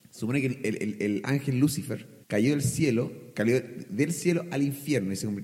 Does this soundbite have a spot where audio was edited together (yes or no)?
yes